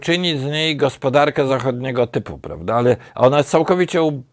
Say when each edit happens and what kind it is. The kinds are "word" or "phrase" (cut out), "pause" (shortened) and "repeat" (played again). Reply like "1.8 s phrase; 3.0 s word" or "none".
none